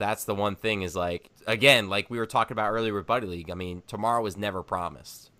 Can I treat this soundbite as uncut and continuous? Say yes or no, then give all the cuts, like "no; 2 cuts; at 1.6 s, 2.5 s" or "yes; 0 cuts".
no; 1 cut; at 1.4 s